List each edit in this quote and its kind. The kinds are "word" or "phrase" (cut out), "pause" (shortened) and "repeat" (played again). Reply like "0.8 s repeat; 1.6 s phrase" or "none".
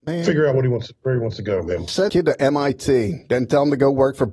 2.1 s word